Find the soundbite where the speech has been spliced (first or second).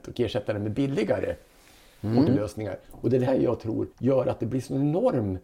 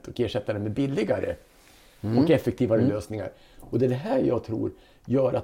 first